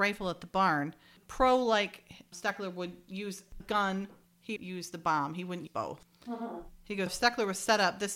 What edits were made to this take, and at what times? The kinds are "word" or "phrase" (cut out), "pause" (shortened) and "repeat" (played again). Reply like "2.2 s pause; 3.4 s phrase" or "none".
2.3 s word; 3.6 s word; 4.2 s word; 4.6 s word; 5.7 s word; 7.1 s word